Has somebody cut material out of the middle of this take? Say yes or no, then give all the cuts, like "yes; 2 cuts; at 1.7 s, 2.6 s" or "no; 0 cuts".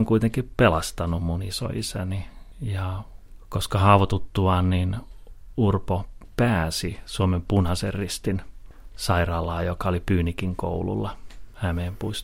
no; 0 cuts